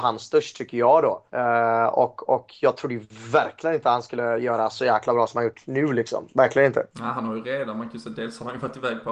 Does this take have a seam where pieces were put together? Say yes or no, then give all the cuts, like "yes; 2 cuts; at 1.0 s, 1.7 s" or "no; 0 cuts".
yes; 2 cuts; at 1.3 s, 6.9 s